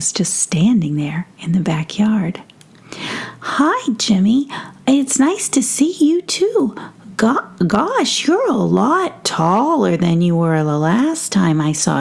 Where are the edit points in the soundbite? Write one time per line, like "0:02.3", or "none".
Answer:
none